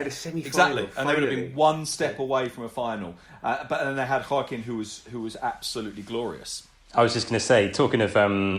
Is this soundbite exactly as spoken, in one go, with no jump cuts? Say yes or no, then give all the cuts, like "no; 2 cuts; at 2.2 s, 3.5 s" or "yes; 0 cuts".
yes; 0 cuts